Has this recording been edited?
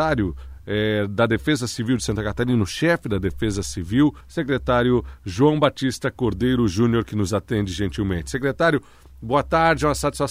yes; 1 cut; at 4.2 s

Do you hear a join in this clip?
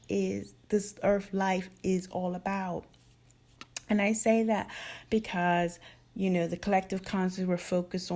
no; 0 cuts

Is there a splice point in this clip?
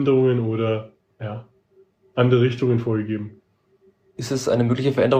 no; 0 cuts

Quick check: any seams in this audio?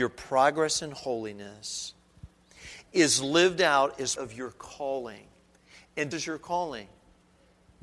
yes; 2 cuts; at 4.2 s, 6.1 s

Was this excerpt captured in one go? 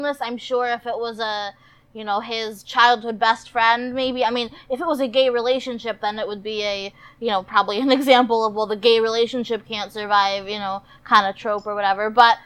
yes; 0 cuts

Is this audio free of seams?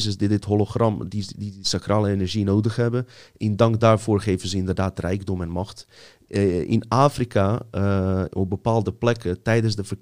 yes; 0 cuts

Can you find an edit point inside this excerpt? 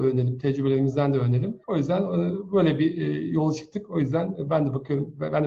yes; 1 cut; at 1.6 s

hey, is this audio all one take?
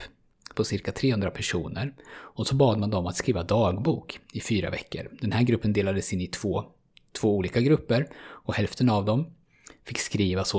yes; 0 cuts

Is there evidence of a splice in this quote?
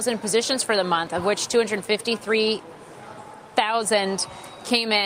no; 0 cuts

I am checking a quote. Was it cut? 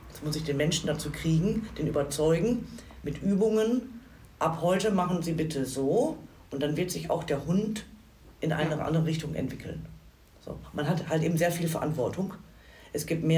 no; 0 cuts

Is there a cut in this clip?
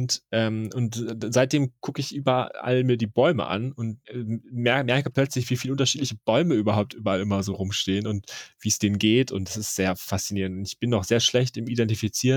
yes; 1 cut; at 4.0 s

